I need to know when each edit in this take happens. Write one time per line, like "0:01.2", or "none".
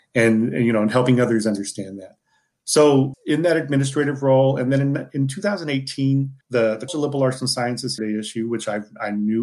0:03.1
0:06.4
0:06.9
0:08.0